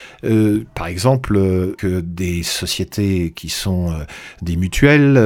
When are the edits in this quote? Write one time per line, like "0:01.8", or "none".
0:01.8